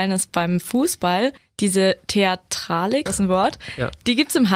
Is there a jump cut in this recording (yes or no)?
yes